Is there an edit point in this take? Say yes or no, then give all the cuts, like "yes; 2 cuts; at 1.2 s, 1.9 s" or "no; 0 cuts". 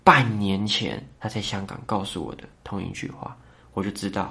yes; 2 cuts; at 1.1 s, 2.5 s